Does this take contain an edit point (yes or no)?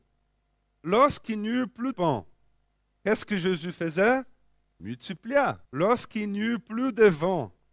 yes